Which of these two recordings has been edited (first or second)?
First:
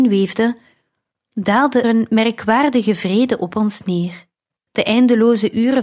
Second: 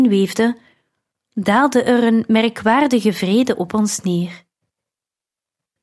first